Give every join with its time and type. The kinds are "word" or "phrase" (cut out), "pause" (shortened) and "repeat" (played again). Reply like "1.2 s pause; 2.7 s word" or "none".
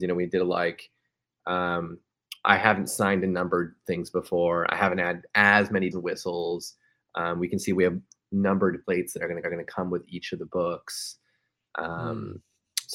5.9 s word; 8.8 s word; 9.4 s repeat

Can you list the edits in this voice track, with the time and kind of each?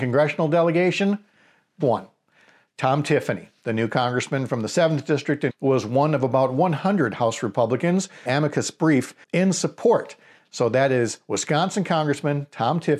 1.8 s word; 5.5 s phrase; 8.3 s phrase; 9.2 s pause

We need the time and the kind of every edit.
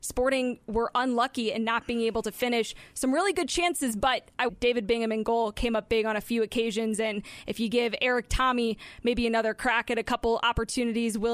4.5 s phrase

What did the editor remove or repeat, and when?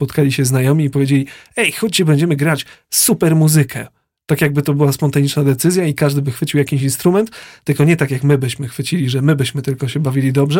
none

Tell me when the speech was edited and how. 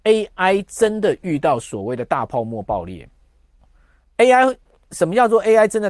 3.6 s pause

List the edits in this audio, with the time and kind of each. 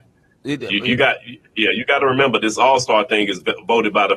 none

